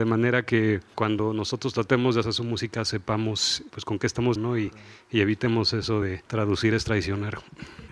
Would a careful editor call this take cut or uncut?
cut